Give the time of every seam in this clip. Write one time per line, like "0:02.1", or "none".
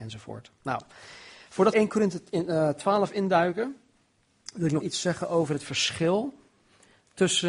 0:01.7
0:04.8